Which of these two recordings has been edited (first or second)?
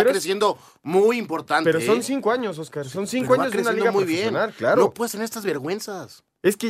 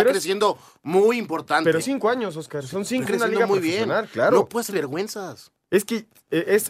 second